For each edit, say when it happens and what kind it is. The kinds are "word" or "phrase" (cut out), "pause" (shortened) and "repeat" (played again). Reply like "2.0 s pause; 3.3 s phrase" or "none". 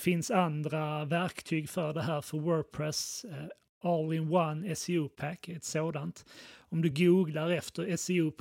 none